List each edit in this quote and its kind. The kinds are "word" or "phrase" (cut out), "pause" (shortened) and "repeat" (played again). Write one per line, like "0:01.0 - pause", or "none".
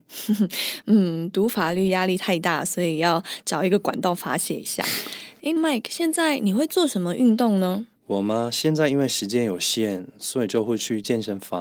0:05.6 - word
0:08.0 - pause